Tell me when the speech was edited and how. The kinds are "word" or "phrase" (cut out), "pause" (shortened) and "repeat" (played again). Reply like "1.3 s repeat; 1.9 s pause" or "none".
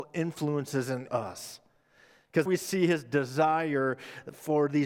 1.1 s word; 2.5 s word

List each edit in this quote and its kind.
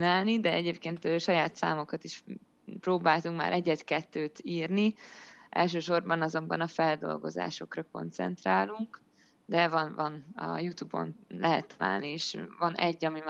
none

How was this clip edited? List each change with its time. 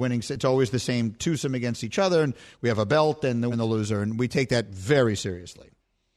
3.5 s word

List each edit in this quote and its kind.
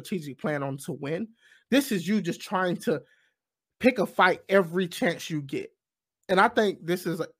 none

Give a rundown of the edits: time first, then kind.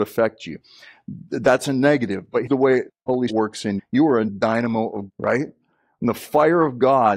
2.5 s word; 2.9 s word; 3.3 s word; 3.8 s word; 4.3 s word; 5.1 s word

